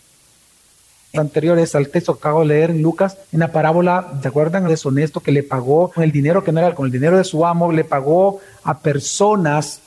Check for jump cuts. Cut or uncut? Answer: cut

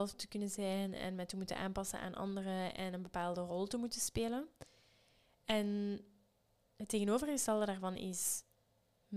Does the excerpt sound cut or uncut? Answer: uncut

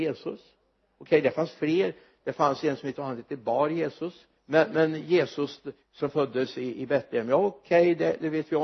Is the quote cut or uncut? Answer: cut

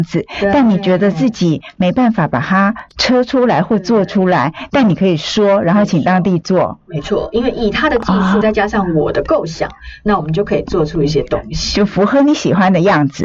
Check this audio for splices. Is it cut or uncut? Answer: cut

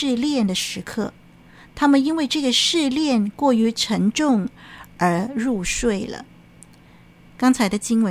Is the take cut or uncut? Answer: uncut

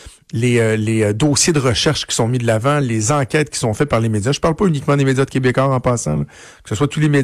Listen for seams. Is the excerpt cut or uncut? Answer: uncut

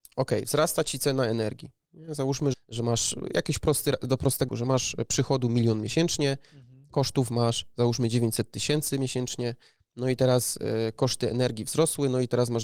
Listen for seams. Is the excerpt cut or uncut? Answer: cut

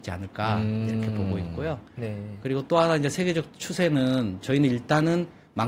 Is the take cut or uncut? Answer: uncut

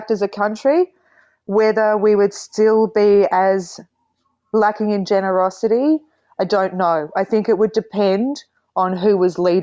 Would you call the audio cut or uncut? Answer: uncut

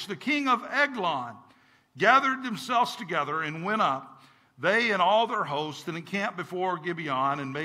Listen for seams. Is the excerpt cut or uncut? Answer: uncut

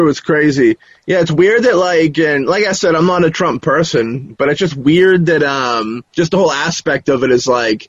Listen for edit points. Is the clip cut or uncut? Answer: cut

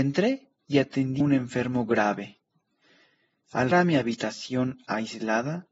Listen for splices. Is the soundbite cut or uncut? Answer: cut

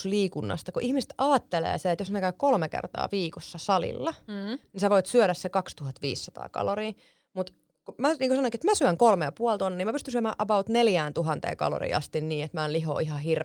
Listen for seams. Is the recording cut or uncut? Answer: uncut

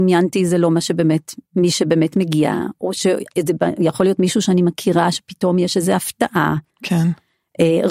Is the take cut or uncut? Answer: cut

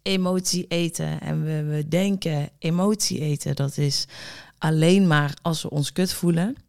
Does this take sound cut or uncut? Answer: uncut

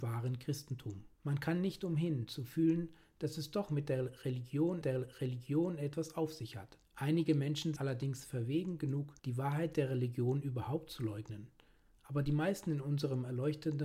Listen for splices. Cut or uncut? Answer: cut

